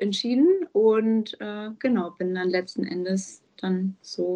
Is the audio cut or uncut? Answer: uncut